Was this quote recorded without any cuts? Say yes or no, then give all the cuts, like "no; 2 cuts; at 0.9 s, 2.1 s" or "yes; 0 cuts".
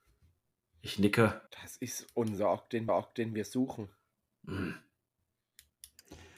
no; 2 cuts; at 1.5 s, 2.9 s